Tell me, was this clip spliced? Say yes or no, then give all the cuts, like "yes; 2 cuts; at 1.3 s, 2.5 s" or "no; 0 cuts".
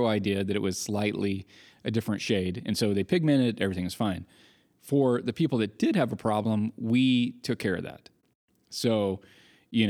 no; 0 cuts